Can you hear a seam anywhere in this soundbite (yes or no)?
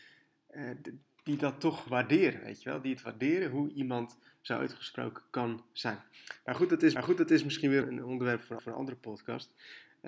yes